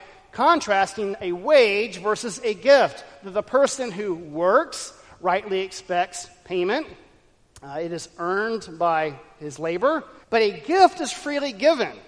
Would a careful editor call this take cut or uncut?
cut